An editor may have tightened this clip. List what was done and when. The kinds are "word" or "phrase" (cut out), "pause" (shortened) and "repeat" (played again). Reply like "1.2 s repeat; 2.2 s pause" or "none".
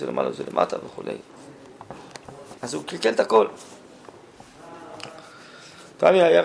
2.6 s pause